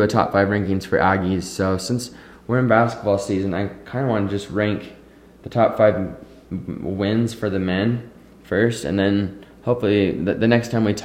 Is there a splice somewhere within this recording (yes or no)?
no